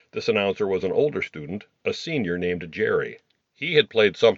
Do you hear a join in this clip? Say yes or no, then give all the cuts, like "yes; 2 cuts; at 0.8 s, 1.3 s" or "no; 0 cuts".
no; 0 cuts